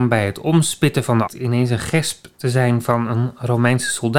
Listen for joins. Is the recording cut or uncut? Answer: cut